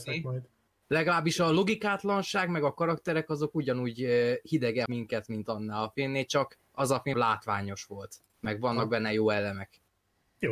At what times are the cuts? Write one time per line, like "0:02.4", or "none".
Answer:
0:04.9
0:07.1